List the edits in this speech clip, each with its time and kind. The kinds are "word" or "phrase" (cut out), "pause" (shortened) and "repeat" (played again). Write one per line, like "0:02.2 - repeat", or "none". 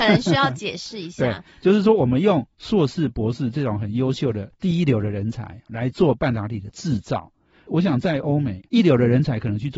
0:05.7 - word
0:08.7 - pause